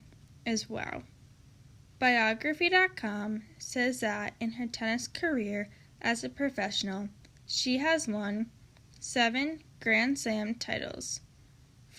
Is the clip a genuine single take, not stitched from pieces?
yes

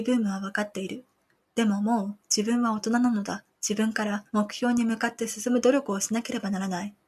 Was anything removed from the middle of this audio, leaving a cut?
yes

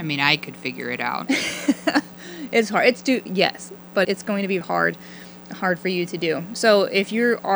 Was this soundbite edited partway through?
yes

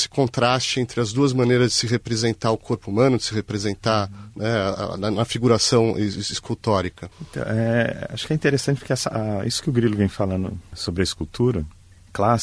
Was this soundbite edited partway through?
yes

